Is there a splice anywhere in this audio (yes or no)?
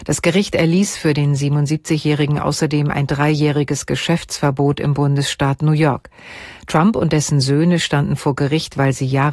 no